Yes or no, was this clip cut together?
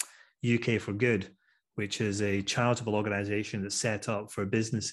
no